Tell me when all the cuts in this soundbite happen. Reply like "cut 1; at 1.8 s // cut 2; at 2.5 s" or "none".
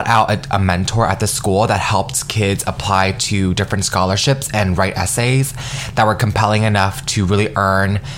none